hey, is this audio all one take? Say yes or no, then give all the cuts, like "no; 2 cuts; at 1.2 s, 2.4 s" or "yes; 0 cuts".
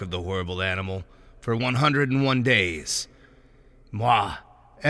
yes; 0 cuts